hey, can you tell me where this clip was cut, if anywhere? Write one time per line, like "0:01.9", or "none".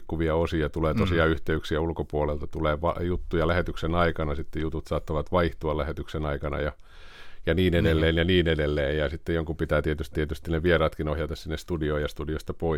0:10.1